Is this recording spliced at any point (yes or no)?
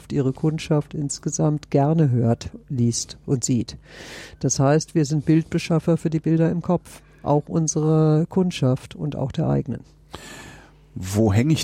no